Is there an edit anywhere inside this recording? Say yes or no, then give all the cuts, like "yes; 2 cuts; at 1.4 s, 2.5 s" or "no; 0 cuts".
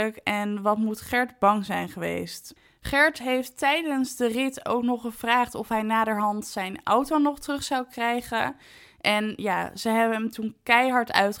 no; 0 cuts